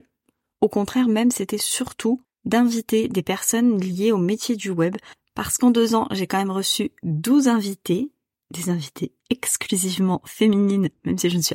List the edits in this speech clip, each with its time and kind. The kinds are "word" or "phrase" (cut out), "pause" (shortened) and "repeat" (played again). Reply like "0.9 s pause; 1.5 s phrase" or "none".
2.2 s pause